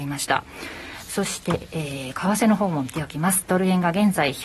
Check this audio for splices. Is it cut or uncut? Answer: uncut